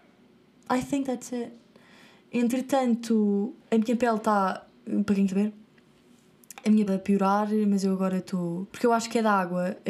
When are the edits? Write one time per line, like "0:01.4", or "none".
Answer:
0:03.6
0:05.3
0:06.9
0:08.7

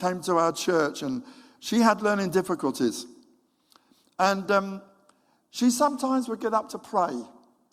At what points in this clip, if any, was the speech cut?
none

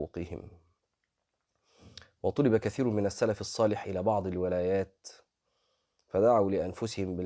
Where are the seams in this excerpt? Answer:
none

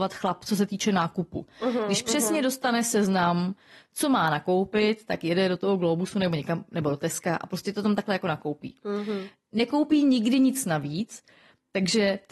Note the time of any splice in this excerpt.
none

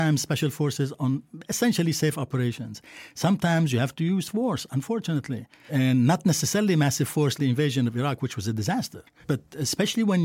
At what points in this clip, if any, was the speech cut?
0:05.7
0:07.4

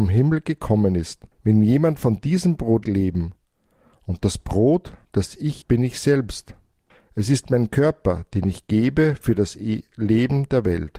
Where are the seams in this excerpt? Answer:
0:01.3
0:02.8
0:05.0
0:05.6
0:06.9

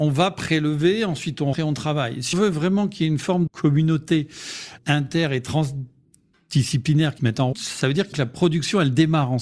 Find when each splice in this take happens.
0:01.5
0:02.3
0:03.5
0:04.8
0:07.2
0:07.5
0:08.1

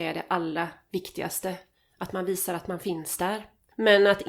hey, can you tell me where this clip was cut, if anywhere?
none

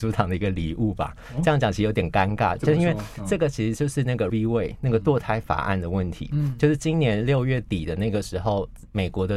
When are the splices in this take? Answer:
0:04.3

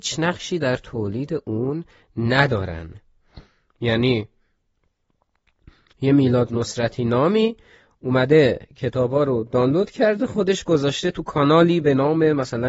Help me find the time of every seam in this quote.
none

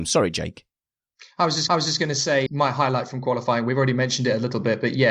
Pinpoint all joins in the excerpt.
0:01.7
0:02.5

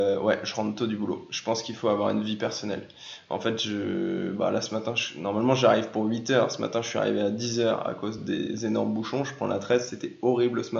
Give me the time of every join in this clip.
none

